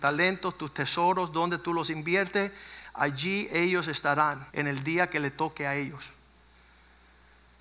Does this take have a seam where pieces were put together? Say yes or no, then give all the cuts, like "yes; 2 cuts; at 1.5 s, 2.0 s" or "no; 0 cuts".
yes; 1 cut; at 4.5 s